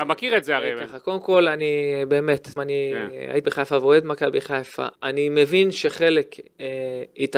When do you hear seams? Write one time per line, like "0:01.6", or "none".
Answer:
0:02.6
0:03.4
0:04.9